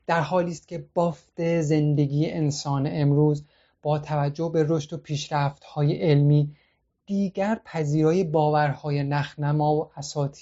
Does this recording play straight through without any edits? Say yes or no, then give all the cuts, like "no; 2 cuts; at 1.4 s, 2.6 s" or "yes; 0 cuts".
yes; 0 cuts